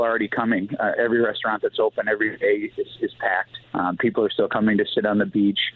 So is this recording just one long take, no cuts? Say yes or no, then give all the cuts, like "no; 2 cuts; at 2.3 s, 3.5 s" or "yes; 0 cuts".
no; 1 cut; at 3.6 s